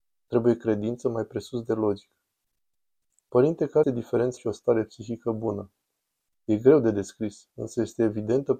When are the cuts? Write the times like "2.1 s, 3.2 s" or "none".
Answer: 3.8 s, 4.4 s